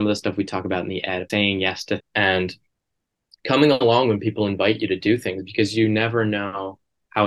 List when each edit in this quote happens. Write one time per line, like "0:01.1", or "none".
0:01.3
0:02.0